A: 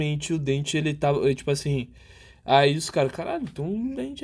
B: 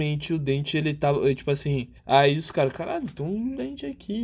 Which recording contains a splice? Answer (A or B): B